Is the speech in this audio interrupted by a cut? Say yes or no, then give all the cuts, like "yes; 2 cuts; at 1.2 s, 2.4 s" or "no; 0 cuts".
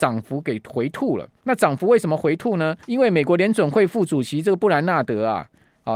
yes; 2 cuts; at 1.4 s, 2.8 s